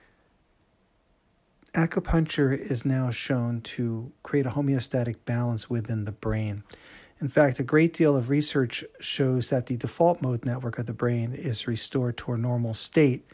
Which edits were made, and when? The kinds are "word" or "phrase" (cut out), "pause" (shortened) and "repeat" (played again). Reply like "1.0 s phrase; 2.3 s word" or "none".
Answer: none

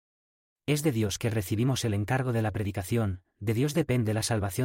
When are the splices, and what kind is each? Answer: none

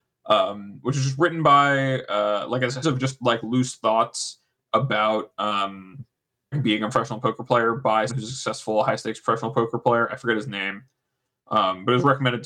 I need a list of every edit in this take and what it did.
2.8 s word; 6.5 s word; 8.1 s word

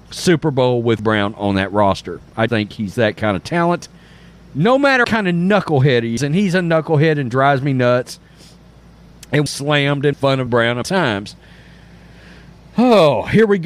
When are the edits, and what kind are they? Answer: 1.0 s word; 2.5 s word; 5.0 s word; 6.2 s word; 9.5 s word; 10.1 s word; 10.5 s word; 10.8 s word

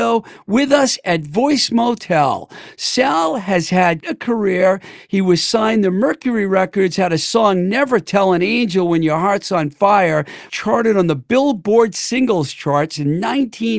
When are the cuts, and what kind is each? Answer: 4.0 s word; 10.5 s word

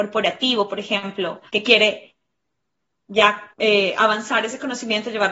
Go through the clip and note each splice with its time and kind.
1.5 s pause; 3.5 s pause

